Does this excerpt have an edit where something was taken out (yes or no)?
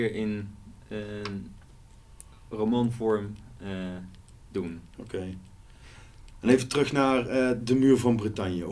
no